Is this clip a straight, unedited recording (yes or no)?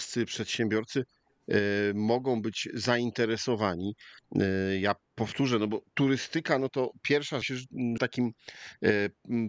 no